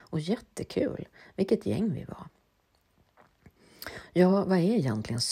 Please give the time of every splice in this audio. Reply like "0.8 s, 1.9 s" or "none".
none